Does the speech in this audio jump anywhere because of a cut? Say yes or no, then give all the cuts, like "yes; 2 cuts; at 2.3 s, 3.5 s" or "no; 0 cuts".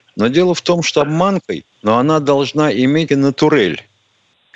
yes; 3 cuts; at 1.0 s, 1.7 s, 3.1 s